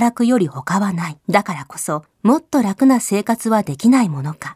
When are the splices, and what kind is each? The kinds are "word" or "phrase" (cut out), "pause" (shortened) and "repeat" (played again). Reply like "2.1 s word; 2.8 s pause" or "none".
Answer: 1.2 s pause; 2.1 s pause